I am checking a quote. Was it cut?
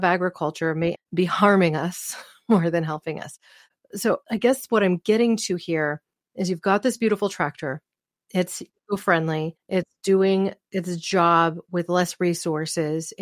yes; 1 cut; at 1.0 s

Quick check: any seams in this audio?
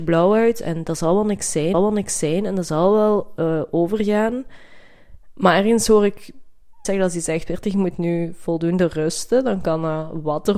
yes; 2 cuts; at 1.7 s, 6.8 s

